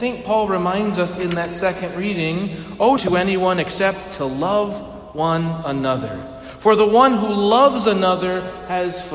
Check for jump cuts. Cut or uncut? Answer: cut